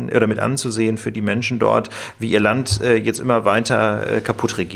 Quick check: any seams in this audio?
no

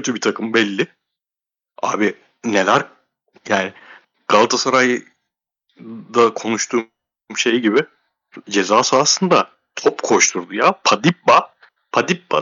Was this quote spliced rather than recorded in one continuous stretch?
no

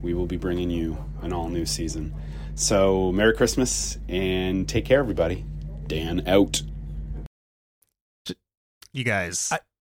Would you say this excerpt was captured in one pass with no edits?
yes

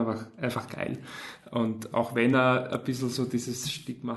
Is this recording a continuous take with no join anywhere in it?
yes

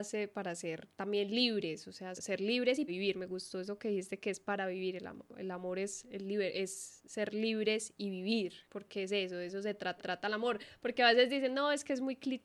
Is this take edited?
yes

